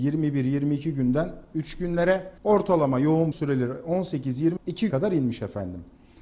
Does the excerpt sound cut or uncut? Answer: cut